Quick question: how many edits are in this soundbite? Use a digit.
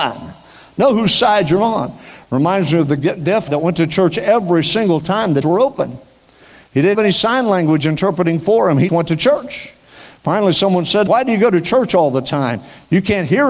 5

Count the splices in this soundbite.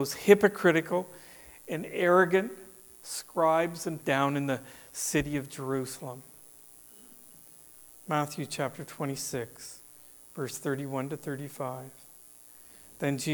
1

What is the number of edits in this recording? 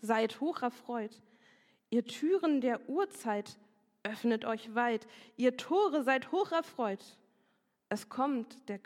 0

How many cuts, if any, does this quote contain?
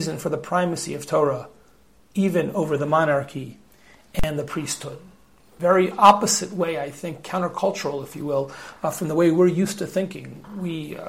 0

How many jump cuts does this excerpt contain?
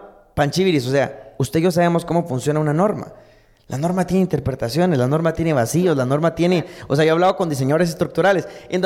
0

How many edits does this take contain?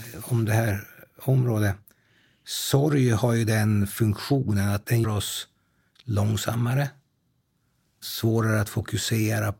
1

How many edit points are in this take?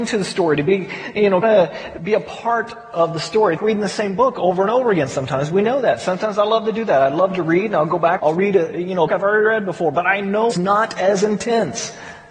5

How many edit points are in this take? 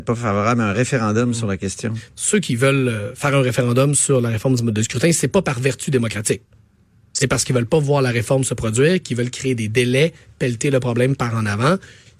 0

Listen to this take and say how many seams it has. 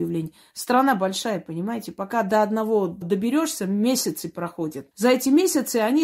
2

